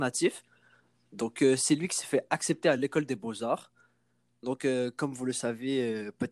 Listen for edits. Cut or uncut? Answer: uncut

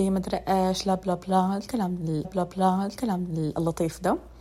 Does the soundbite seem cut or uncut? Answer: cut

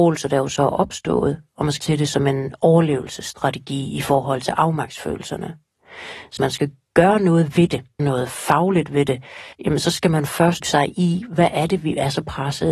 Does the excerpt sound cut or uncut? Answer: cut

